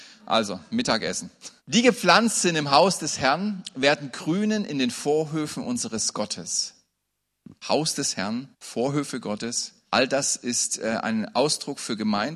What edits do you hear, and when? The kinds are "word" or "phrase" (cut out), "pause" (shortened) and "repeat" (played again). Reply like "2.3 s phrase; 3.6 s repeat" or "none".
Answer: 1.6 s pause; 7.6 s pause; 8.5 s pause; 9.8 s pause